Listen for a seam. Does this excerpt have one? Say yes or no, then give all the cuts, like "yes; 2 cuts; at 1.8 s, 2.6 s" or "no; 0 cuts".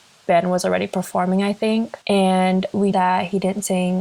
yes; 2 cuts; at 2.0 s, 2.9 s